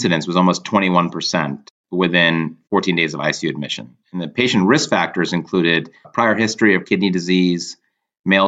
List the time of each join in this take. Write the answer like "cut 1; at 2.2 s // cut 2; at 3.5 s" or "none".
cut 1; at 6.0 s // cut 2; at 6.8 s

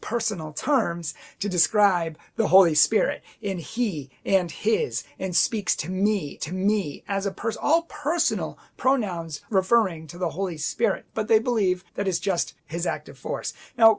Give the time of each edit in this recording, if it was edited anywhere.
cut 1; at 6.4 s // cut 2; at 9.5 s // cut 3; at 11.9 s // cut 4; at 12.6 s

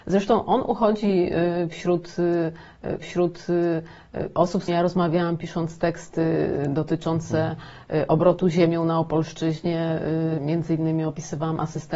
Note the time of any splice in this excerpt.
cut 1; at 3.0 s // cut 2; at 4.7 s

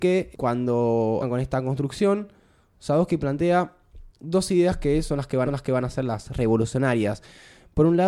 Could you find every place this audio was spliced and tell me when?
cut 1; at 1.2 s // cut 2; at 4.1 s // cut 3; at 5.5 s

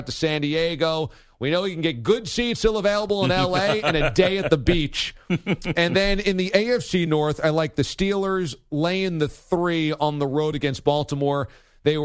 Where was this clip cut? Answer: none

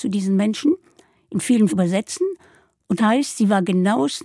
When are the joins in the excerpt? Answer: cut 1; at 1.7 s // cut 2; at 3.0 s

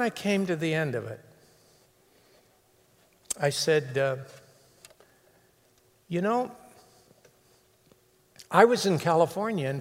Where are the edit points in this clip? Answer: none

